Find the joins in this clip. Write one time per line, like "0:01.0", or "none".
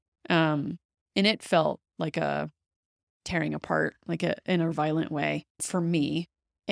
0:04.7
0:05.6